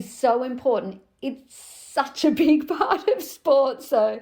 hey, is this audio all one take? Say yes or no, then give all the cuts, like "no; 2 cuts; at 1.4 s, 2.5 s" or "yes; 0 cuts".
yes; 0 cuts